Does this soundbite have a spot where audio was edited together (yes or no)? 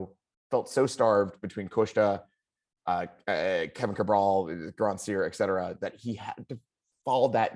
no